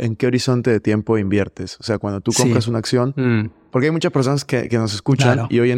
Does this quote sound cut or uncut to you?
uncut